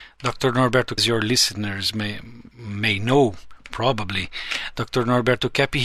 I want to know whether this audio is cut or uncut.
cut